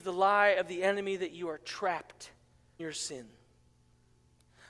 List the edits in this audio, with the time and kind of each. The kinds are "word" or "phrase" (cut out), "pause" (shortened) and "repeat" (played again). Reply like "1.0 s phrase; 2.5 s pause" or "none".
2.8 s word